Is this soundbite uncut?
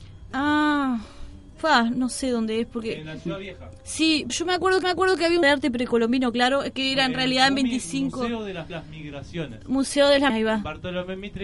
no; 5 cuts; at 4.3 s, 4.8 s, 5.4 s, 8.7 s, 10.3 s

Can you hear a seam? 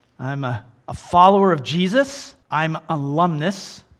yes; 1 cut; at 2.4 s

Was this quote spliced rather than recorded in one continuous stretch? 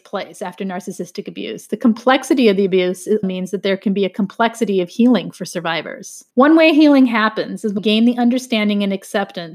yes; 3 cuts; at 3.2 s, 6.3 s, 7.8 s

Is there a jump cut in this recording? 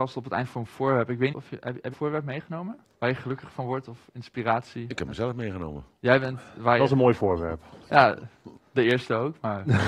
yes; 3 cuts; at 1.3 s, 1.9 s, 2.8 s

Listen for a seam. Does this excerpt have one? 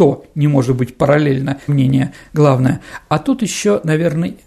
yes; 1 cut; at 1.7 s

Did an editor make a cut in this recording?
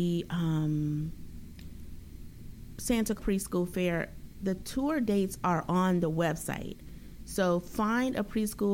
yes; 1 cut; at 3.2 s

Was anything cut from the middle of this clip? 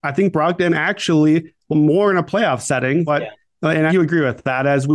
yes; 3 cuts; at 1.7 s, 3.1 s, 3.9 s

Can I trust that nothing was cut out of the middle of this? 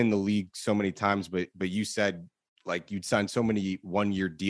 yes; 0 cuts

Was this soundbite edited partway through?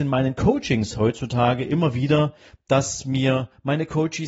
no; 0 cuts

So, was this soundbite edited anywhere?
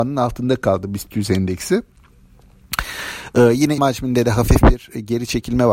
yes; 1 cut; at 3.8 s

